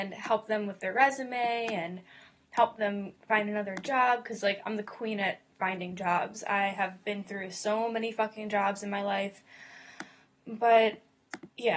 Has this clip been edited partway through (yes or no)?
no